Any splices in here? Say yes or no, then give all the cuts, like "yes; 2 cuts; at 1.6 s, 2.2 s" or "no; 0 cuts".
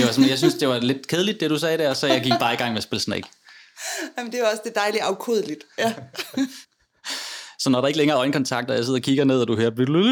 yes; 1 cut; at 6.6 s